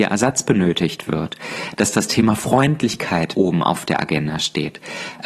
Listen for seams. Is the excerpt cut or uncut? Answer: cut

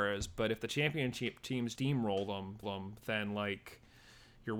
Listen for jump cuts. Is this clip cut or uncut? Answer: cut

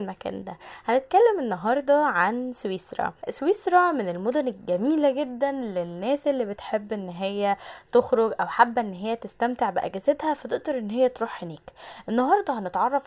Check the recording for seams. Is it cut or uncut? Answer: cut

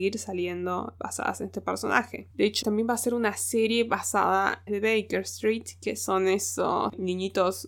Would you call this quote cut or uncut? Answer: cut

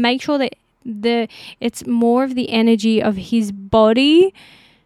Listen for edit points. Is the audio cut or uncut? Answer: uncut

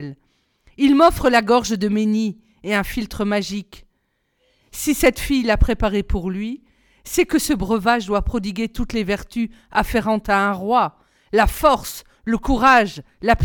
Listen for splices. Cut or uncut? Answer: uncut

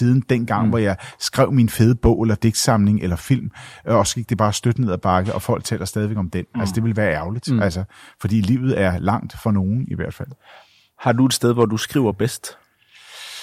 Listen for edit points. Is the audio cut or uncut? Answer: uncut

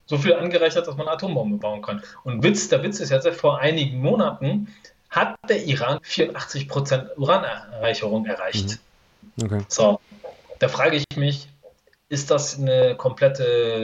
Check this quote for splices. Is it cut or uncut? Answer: cut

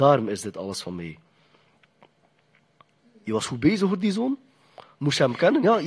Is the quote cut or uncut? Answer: uncut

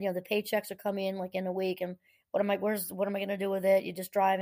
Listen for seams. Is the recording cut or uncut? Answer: uncut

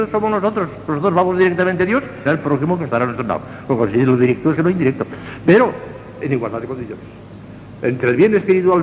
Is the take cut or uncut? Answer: cut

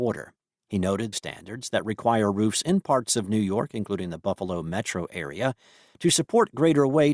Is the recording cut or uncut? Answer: cut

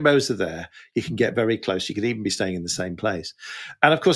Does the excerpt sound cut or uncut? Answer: uncut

